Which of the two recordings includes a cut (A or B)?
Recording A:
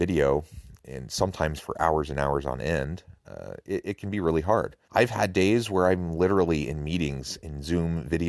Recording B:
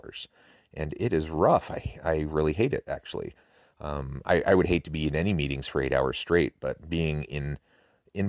A